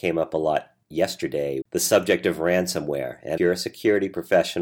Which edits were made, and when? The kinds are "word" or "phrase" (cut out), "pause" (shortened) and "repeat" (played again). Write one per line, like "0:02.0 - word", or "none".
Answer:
0:01.6 - word
0:03.4 - word